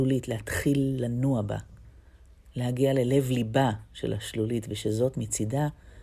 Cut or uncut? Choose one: uncut